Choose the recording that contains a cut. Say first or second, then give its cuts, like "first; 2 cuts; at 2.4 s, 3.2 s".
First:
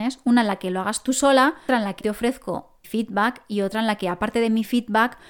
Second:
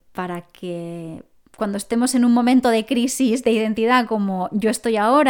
first; 3 cuts; at 1.7 s, 2.0 s, 2.8 s